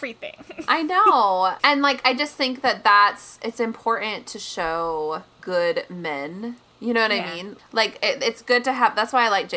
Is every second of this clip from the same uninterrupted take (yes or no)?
no